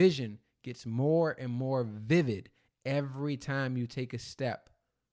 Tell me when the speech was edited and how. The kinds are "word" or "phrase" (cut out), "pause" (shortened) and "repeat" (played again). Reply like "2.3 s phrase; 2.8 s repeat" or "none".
none